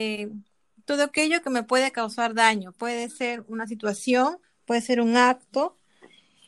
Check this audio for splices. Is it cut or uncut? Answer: uncut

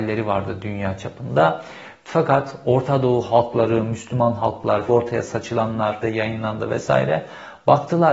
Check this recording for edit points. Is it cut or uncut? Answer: cut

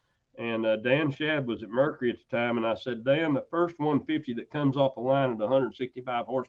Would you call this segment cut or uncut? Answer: uncut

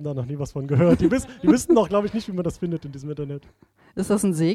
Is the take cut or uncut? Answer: uncut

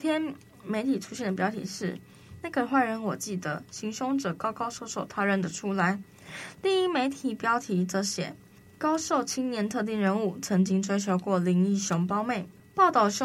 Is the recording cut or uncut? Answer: uncut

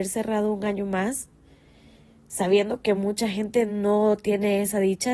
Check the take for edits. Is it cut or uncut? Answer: uncut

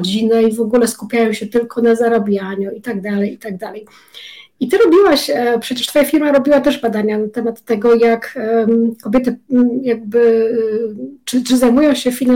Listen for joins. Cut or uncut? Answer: uncut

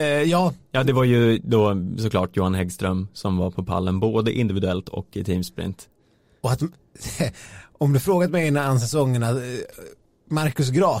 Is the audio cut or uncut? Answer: uncut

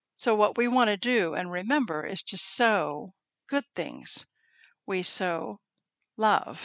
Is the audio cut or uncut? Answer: uncut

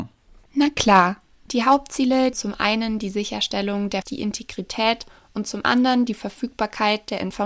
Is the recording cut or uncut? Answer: cut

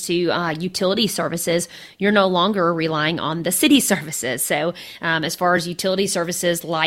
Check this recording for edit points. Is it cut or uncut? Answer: uncut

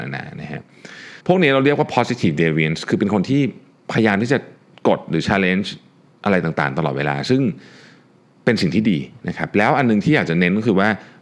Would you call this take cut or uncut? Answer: cut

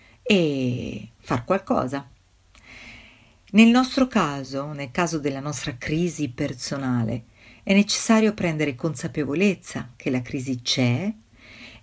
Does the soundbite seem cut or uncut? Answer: uncut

